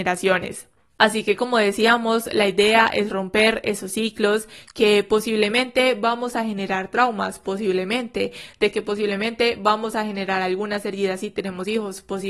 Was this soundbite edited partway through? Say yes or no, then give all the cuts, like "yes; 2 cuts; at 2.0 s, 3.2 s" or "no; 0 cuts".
no; 0 cuts